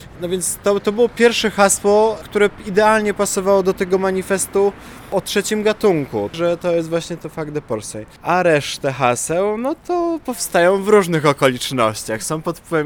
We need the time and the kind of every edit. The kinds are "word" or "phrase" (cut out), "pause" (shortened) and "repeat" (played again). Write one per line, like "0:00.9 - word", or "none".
none